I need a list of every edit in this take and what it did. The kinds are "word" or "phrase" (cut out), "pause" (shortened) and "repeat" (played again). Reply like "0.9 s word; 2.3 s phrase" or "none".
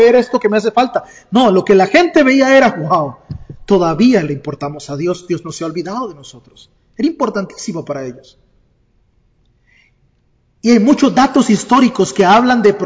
none